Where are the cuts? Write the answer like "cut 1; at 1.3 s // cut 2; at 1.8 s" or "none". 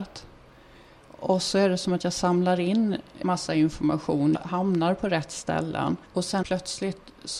cut 1; at 4.3 s // cut 2; at 6.1 s // cut 3; at 6.4 s